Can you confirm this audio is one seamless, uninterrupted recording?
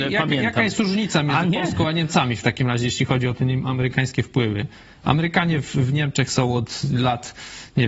yes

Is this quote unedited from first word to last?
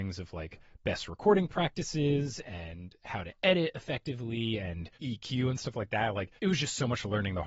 no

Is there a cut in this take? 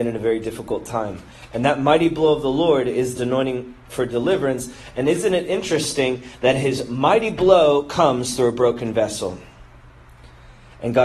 yes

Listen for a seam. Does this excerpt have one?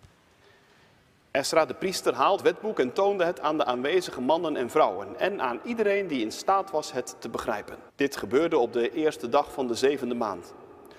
yes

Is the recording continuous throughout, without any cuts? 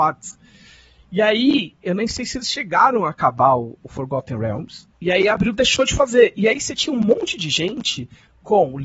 no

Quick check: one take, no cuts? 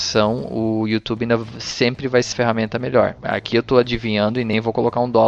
no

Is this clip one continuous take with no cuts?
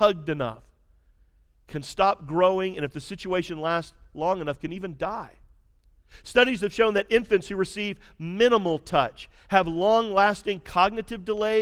yes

